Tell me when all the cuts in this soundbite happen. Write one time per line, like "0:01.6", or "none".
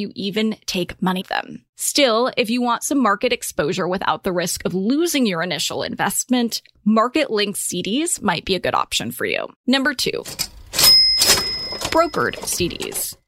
0:01.2